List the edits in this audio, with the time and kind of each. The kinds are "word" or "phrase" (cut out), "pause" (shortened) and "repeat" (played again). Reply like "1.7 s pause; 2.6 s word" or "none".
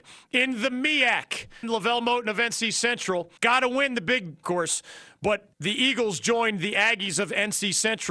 1.6 s phrase; 3.4 s pause; 4.4 s phrase; 5.5 s pause